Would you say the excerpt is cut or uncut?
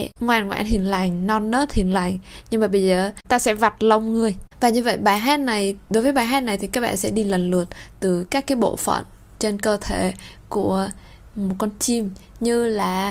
uncut